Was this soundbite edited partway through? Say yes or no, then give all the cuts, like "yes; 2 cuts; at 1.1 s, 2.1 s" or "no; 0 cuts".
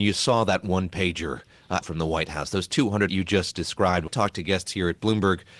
yes; 3 cuts; at 1.8 s, 3.1 s, 4.1 s